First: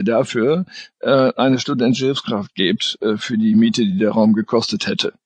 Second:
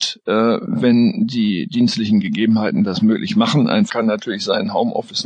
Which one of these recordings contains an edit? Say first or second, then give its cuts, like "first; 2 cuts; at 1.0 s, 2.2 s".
second; 1 cut; at 3.9 s